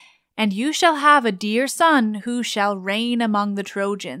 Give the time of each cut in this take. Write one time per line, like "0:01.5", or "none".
none